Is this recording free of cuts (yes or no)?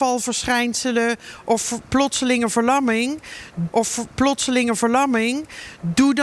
no